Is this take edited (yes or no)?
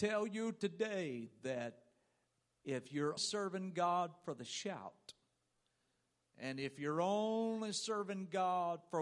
yes